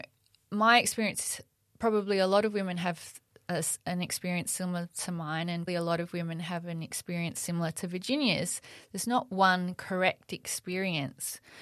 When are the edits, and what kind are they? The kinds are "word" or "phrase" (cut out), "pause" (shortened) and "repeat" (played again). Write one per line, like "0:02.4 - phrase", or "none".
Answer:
0:05.7 - word